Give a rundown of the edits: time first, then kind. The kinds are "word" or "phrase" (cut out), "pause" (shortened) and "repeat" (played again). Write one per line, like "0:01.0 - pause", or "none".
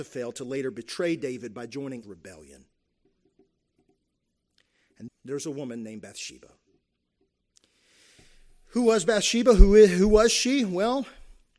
0:02.0 - word
0:05.1 - word